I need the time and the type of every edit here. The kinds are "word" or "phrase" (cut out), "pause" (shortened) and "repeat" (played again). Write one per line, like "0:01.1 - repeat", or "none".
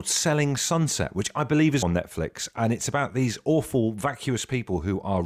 0:01.8 - word